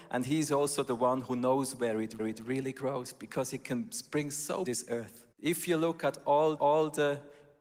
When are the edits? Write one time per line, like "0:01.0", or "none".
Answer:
0:02.2
0:04.6
0:05.3
0:06.6